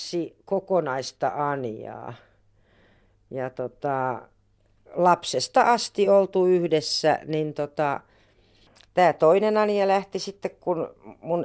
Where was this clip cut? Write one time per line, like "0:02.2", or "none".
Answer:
none